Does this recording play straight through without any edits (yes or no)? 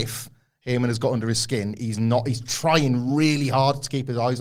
yes